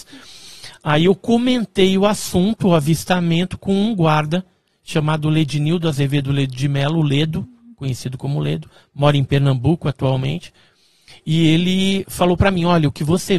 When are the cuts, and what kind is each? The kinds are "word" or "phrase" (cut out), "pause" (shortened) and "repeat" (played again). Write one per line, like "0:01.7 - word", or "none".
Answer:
none